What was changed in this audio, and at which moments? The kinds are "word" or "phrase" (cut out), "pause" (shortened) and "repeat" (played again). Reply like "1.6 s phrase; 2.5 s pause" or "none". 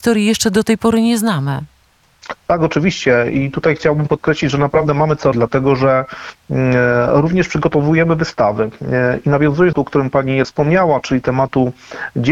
5.3 s word; 9.7 s phrase; 10.4 s word